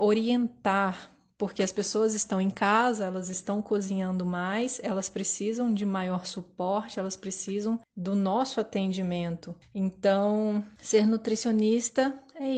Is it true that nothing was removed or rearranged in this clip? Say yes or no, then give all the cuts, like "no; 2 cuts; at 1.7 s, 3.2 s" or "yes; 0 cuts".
yes; 0 cuts